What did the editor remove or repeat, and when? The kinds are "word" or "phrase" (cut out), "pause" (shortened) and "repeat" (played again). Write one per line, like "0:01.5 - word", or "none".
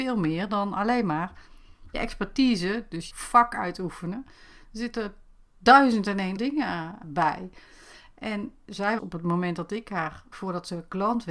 0:01.9 - word
0:03.1 - word
0:06.4 - word
0:07.0 - word
0:09.0 - word
0:10.3 - word